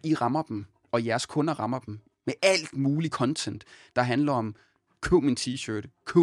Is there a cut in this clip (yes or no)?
no